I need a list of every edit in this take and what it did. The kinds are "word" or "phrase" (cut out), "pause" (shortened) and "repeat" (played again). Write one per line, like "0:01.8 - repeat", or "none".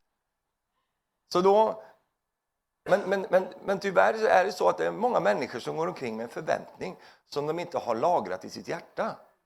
none